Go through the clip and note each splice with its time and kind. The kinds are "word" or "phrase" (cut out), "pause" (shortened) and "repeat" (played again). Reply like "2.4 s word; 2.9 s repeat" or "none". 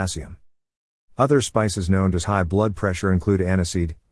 2.2 s word